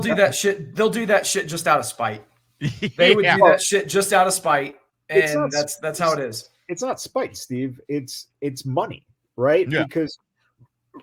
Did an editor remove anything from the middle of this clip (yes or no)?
no